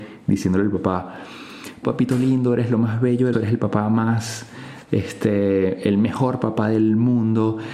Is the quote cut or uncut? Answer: cut